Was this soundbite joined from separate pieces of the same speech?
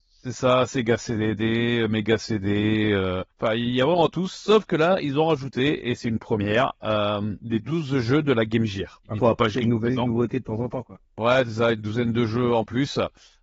yes; 3 cuts; at 3.3 s, 9.0 s, 11.1 s

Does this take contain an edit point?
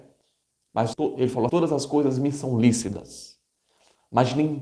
yes; 2 cuts; at 0.9 s, 1.5 s

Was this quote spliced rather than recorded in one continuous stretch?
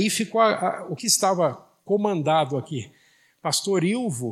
yes; 2 cuts; at 1.0 s, 1.8 s

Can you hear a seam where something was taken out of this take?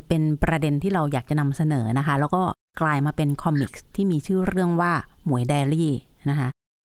no; 0 cuts

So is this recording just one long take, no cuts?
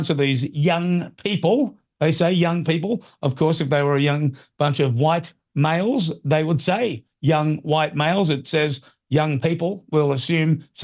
yes; 0 cuts

